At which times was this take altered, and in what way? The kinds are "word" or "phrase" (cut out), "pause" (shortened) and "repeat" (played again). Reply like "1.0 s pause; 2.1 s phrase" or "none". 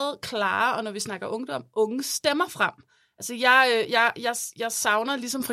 none